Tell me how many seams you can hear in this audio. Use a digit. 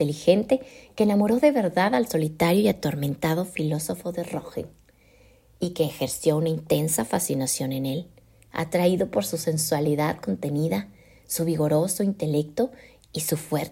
0